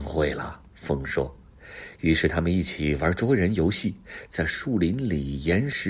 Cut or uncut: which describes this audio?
uncut